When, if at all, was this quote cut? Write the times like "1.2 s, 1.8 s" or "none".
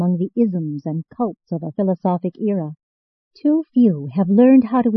1.7 s

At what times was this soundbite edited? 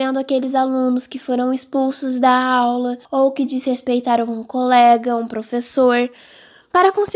3.0 s

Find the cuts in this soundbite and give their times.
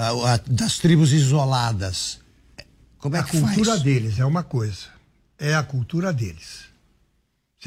none

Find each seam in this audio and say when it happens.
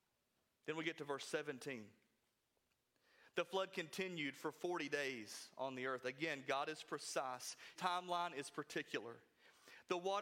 7.8 s

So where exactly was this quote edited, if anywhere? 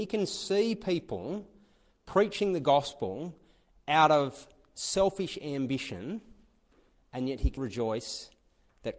7.6 s

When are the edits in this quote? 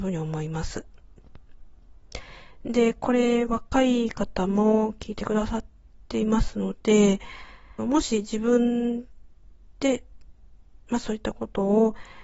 7.8 s

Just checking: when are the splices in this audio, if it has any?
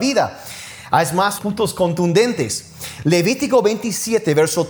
1.4 s

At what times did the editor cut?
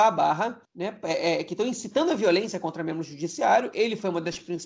none

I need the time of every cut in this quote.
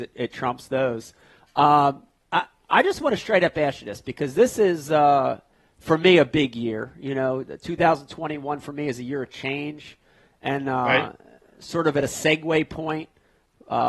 none

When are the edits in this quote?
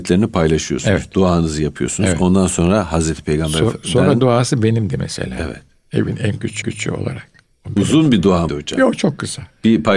6.6 s, 8.5 s

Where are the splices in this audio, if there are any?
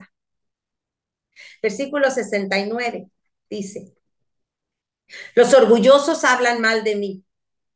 none

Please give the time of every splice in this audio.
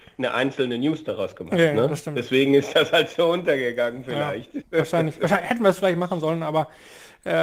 none

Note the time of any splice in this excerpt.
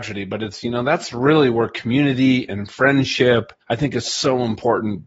3.6 s

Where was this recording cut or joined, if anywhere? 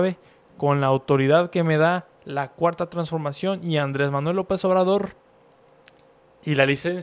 none

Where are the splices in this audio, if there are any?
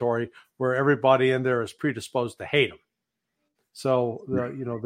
none

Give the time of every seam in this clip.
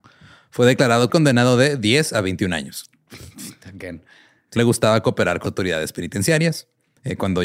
1.1 s, 4.6 s, 5.4 s

